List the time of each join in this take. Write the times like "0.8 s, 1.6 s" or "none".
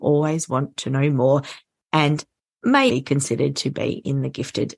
2.9 s

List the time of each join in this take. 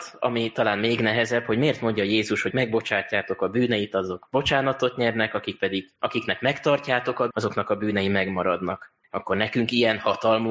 2.5 s, 6.0 s, 7.3 s, 9.0 s

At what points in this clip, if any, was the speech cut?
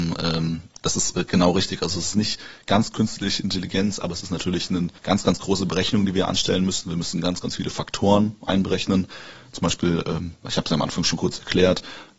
5.0 s

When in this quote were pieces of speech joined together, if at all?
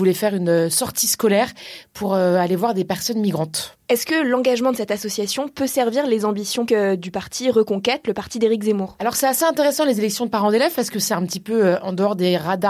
6.7 s

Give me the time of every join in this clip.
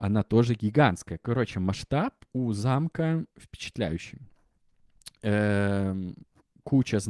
3.3 s

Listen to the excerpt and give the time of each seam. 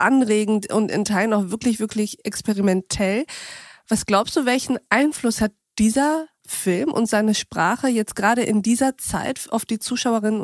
none

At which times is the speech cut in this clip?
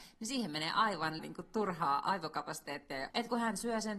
1.2 s, 3.1 s

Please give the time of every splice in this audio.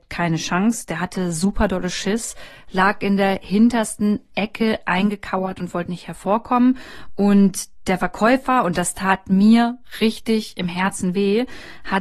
none

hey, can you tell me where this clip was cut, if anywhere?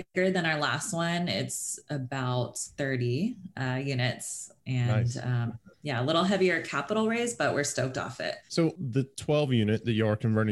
5.7 s, 8.4 s

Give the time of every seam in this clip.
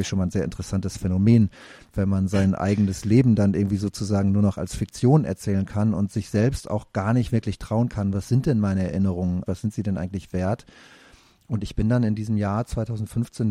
9.5 s

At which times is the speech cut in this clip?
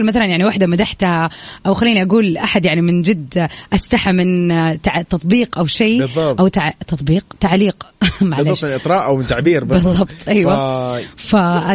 7.3 s

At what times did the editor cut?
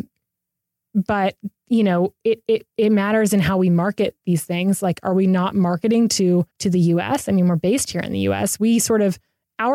6.5 s

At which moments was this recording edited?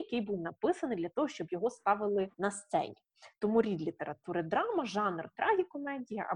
2.3 s

